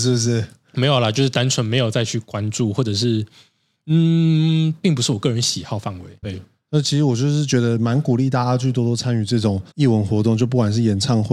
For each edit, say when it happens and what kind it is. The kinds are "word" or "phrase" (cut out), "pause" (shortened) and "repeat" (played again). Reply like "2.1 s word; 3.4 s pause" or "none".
6.2 s word; 9.7 s pause